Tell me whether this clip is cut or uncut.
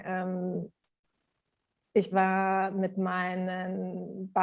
cut